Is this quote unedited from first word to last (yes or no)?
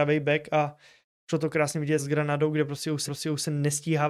no